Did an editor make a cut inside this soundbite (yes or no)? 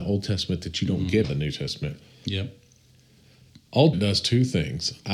yes